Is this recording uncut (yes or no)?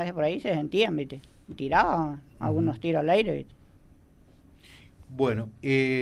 yes